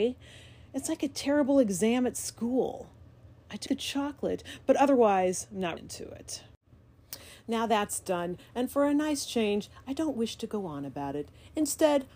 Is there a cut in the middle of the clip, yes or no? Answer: yes